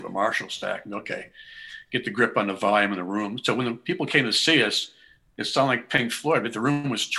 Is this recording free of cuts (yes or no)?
yes